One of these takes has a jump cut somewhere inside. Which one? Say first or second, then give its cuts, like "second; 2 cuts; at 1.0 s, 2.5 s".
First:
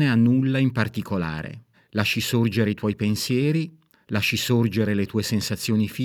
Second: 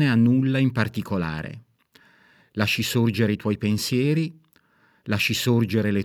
first; 2 cuts; at 1.7 s, 3.9 s